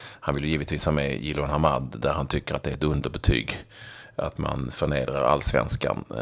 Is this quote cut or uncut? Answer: uncut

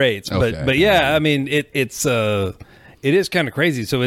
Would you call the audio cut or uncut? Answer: uncut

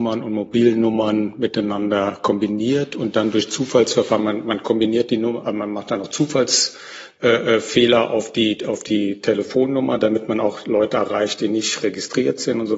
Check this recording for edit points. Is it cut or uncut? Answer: uncut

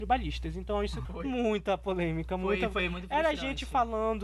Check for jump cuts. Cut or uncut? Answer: cut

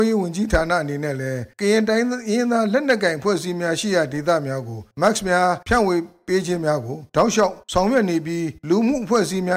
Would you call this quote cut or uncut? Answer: cut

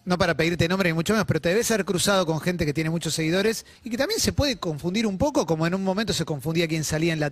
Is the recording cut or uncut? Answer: cut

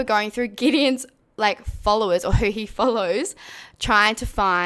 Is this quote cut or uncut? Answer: uncut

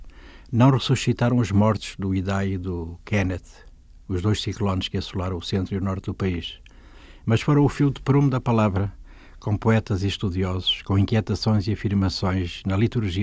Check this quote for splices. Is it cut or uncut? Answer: uncut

